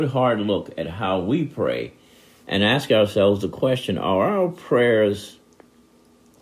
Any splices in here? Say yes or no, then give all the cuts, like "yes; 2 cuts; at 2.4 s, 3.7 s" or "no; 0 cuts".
no; 0 cuts